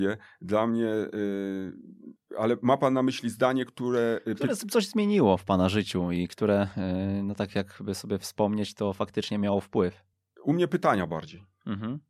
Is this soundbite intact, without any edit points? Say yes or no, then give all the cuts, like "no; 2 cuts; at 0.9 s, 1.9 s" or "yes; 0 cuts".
yes; 0 cuts